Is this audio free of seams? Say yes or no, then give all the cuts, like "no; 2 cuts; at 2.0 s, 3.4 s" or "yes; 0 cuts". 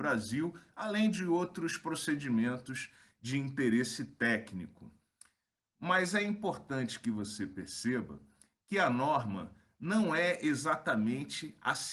yes; 0 cuts